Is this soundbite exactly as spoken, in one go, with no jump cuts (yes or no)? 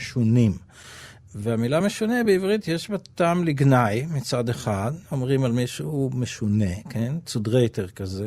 yes